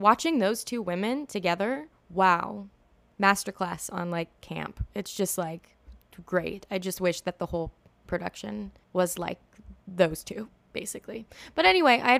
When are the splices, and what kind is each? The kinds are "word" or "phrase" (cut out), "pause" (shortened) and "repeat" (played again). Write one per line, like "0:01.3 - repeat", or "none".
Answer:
0:01.9 - pause
0:08.8 - pause
0:09.8 - pause

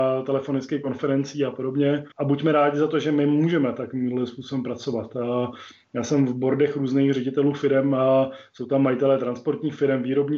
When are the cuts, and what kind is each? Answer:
0:02.1 - pause

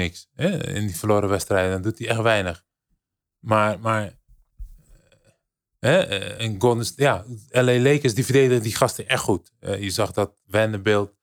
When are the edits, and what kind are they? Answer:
none

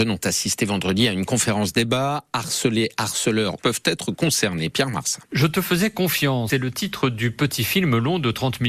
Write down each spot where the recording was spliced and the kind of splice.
0:03.6 - phrase
0:05.3 - pause
0:06.5 - word

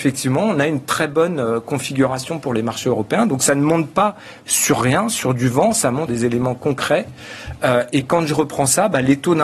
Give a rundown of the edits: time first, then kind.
0:06.1 - word

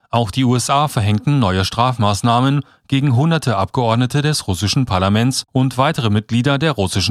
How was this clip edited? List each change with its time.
0:05.5 - pause

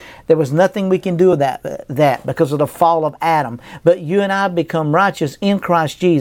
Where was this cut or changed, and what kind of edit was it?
none

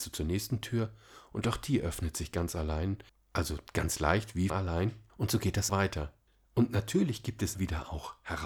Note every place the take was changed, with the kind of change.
0:03.1 - pause
0:04.5 - word
0:05.1 - pause
0:05.7 - word
0:06.3 - pause
0:07.5 - word

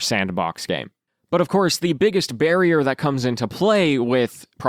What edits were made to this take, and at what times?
none

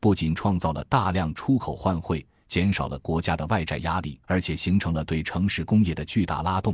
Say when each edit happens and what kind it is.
0:04.2 - pause

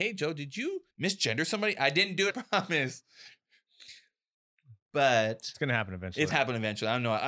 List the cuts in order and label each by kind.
0:00.9 - pause
0:02.3 - phrase
0:06.3 - word

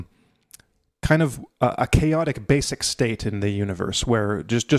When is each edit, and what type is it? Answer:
none

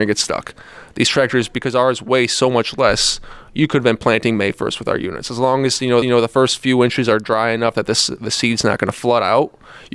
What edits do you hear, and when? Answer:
0:06.0 - repeat

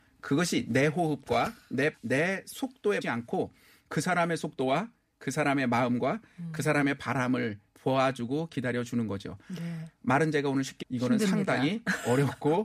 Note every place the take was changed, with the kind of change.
0:01.9 - word
0:03.0 - word
0:07.7 - pause
0:10.8 - word

